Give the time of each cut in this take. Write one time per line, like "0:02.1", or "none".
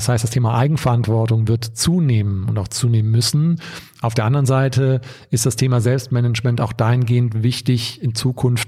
none